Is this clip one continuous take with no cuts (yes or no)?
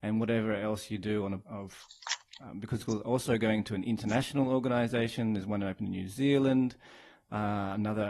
no